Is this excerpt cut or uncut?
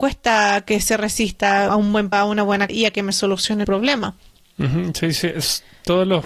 cut